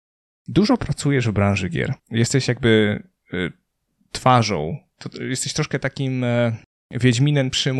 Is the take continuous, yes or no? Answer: no